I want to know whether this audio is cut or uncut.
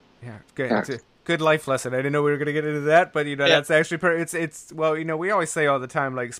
uncut